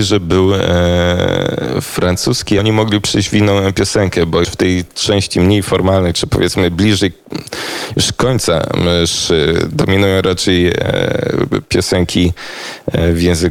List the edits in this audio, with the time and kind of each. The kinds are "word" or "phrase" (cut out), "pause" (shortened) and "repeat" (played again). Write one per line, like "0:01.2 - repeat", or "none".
0:02.6 - word
0:04.4 - word